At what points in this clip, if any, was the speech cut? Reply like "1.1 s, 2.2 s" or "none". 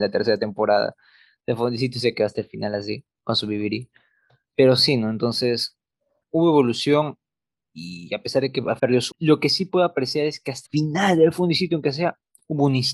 6.2 s, 8.8 s, 9.1 s, 10.6 s